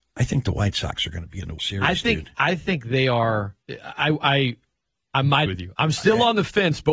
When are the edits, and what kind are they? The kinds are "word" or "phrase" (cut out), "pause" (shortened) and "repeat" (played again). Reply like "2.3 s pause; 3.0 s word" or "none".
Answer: 1.6 s word; 3.6 s pause; 4.7 s pause; 5.5 s word